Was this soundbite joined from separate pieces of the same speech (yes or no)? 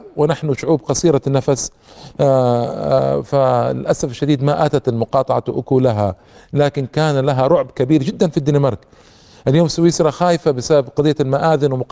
no